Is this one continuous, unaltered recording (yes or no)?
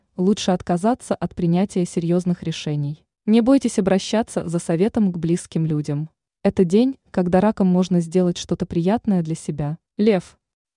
no